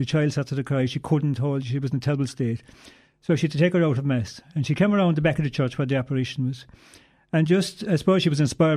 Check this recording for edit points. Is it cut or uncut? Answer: uncut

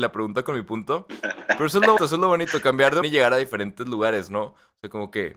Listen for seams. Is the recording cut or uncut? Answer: cut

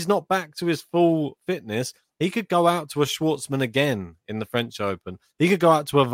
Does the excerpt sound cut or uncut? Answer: uncut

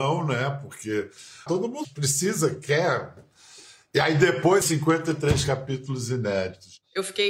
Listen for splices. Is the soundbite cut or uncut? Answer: cut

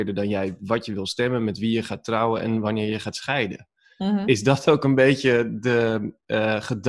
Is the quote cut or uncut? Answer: uncut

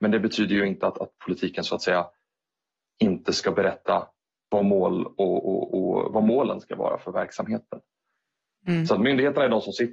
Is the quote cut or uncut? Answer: uncut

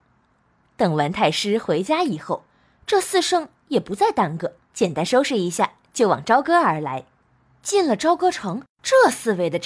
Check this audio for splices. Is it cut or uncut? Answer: cut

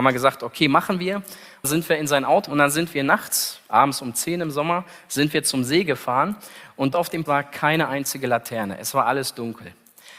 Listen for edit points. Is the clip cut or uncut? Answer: cut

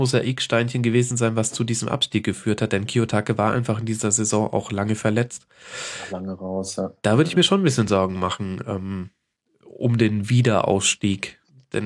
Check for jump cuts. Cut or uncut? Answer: uncut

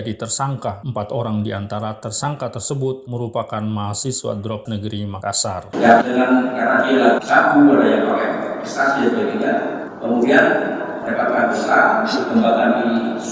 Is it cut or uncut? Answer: cut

